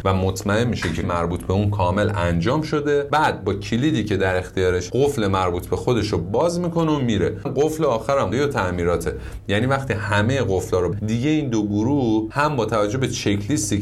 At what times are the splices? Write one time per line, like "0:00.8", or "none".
0:01.0
0:04.9
0:07.5
0:08.3
0:10.9